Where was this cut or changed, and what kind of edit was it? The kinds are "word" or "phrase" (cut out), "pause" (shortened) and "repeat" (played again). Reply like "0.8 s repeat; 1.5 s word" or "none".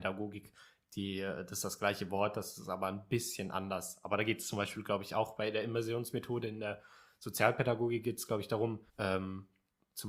8.9 s pause